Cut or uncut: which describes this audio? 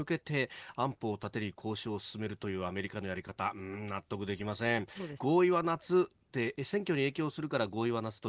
cut